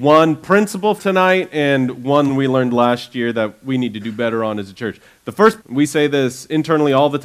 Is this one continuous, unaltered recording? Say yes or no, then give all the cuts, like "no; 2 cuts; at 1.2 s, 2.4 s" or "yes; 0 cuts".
no; 3 cuts; at 1.0 s, 2.3 s, 5.6 s